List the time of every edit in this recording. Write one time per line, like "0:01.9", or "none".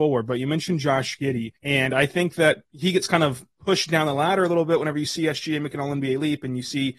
0:01.6
0:02.7
0:03.5